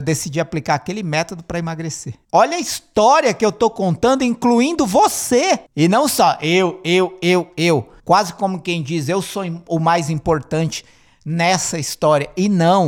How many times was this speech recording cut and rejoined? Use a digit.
3